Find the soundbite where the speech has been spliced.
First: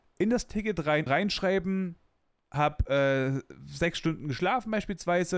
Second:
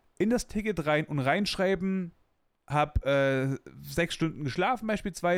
first; 1 cut; at 1.1 s

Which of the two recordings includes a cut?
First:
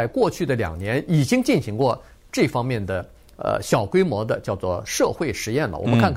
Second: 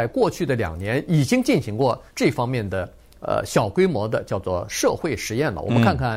second; 1 cut; at 2.1 s

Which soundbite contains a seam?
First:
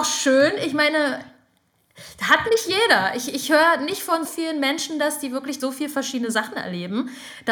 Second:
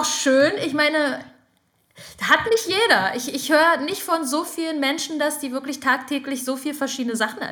first; 2 cuts; at 4.2 s, 5.6 s

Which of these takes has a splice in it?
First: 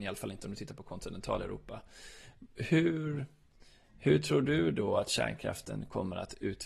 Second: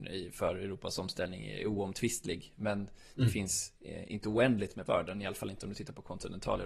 second; 1 cut; at 4.9 s

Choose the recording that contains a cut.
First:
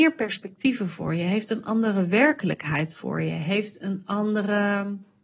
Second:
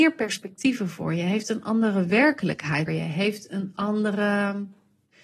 second; 1 cut; at 2.9 s

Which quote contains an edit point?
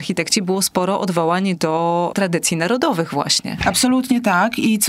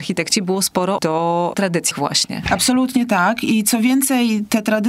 second; 2 cuts; at 1.0 s, 1.9 s

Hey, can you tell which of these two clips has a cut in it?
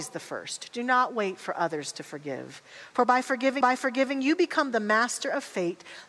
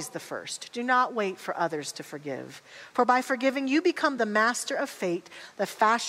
first; 1 cut; at 3.6 s

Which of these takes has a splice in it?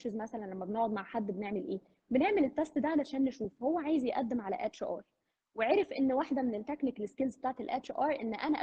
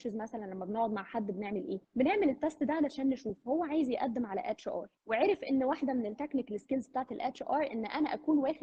second; 2 cuts; at 1.8 s, 5.0 s

